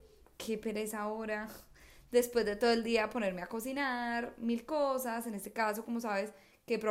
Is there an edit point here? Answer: no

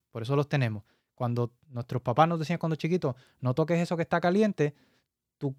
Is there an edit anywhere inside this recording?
no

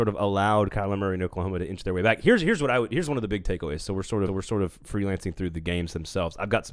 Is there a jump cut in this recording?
yes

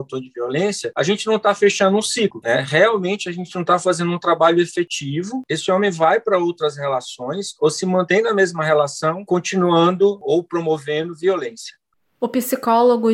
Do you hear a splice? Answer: no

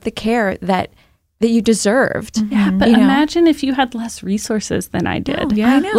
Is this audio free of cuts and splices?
yes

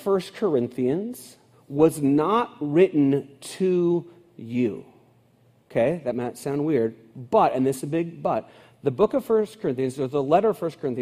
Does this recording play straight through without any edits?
yes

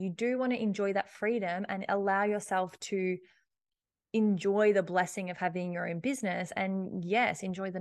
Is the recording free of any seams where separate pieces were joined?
yes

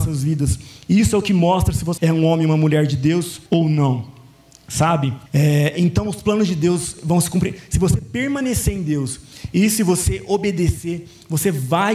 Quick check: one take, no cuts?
no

